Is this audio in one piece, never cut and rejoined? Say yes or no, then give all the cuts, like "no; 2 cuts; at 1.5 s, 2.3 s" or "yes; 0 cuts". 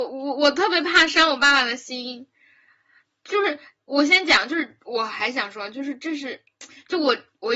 yes; 0 cuts